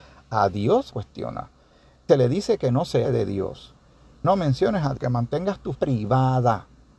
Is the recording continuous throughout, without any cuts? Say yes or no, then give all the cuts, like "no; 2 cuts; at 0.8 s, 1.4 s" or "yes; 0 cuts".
no; 6 cuts; at 0.9 s, 2.1 s, 3.0 s, 4.2 s, 5.0 s, 5.7 s